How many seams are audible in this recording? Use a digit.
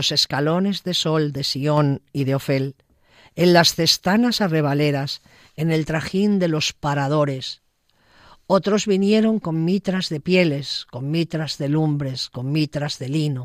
0